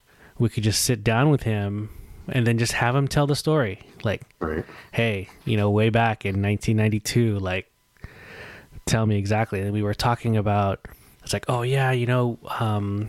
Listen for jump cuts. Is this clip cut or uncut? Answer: uncut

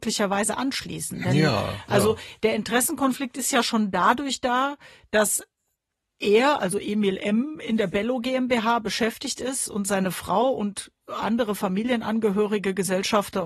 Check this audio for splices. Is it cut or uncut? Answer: uncut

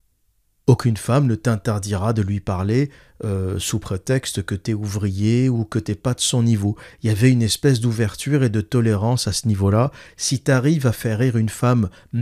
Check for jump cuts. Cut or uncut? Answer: uncut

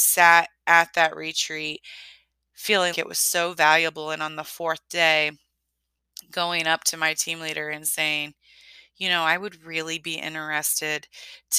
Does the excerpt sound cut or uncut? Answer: cut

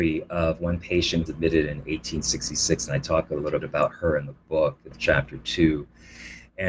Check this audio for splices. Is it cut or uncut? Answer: cut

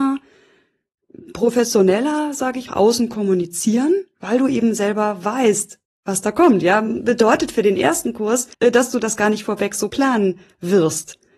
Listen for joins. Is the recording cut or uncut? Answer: cut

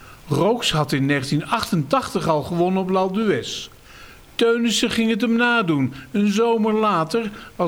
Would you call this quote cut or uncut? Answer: uncut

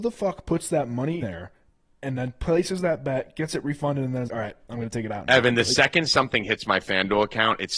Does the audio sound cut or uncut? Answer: cut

